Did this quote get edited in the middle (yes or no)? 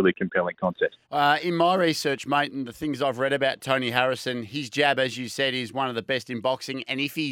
yes